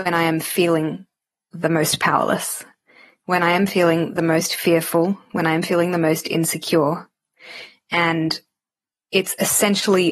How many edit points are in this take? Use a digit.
0